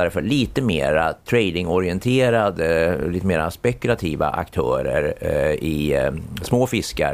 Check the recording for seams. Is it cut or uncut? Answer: uncut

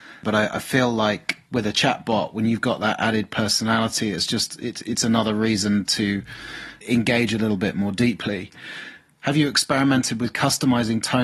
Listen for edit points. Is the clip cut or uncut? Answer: uncut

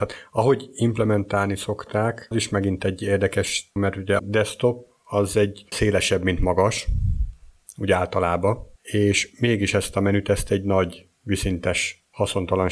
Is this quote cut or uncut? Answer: cut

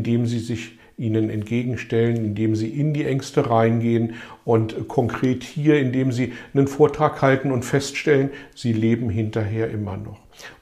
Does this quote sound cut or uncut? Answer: uncut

